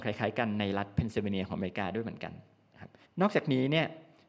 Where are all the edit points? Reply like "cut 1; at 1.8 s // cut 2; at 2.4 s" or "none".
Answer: cut 1; at 3.0 s